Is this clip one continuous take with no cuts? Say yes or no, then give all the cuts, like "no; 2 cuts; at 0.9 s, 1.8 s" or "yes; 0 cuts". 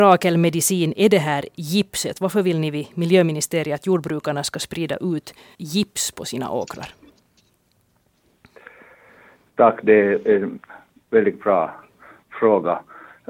no; 1 cut; at 5.5 s